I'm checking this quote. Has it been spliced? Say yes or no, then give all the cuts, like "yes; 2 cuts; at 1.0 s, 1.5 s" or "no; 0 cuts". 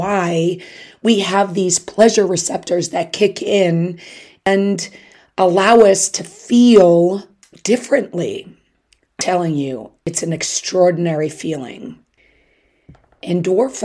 no; 0 cuts